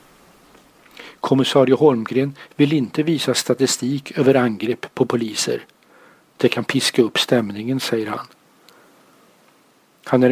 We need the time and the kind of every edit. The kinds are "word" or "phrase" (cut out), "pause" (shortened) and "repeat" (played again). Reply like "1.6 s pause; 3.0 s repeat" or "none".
none